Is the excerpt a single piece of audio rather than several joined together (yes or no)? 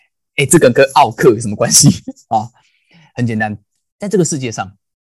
no